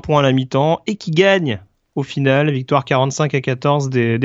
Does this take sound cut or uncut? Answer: uncut